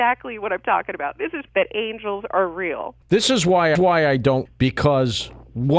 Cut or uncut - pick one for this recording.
cut